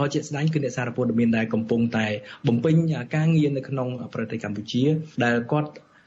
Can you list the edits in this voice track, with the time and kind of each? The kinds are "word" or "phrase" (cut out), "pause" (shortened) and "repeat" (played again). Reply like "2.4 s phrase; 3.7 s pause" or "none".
5.1 s pause